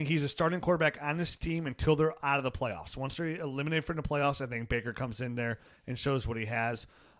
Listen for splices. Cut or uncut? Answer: uncut